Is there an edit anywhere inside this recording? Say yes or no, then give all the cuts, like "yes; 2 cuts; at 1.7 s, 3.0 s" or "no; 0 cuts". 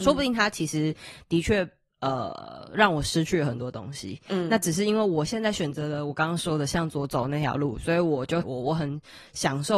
yes; 1 cut; at 8.4 s